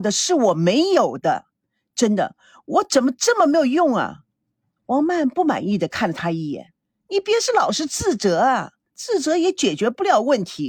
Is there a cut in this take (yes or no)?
yes